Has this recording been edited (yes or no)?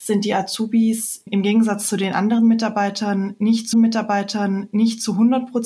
yes